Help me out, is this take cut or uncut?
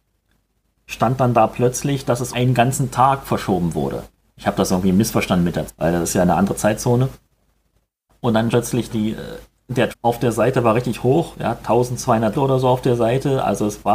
cut